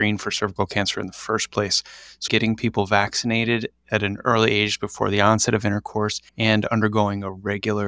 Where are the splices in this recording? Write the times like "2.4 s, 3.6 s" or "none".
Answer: 2.3 s, 6.3 s